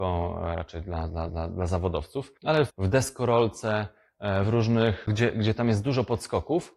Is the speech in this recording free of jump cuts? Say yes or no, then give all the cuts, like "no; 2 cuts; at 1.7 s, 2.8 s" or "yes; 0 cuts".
no; 4 cuts; at 1.3 s, 2.4 s, 2.7 s, 5.1 s